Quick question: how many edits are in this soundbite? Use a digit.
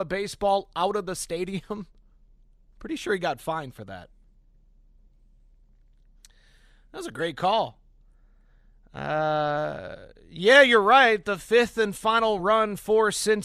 0